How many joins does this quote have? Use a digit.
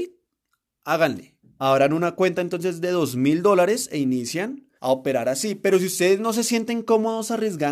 2